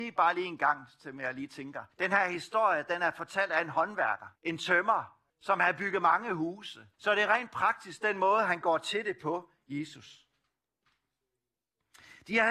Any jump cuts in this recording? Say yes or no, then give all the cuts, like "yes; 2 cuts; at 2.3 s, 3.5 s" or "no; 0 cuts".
yes; 4 cuts; at 1.9 s, 4.4 s, 5.3 s, 6.9 s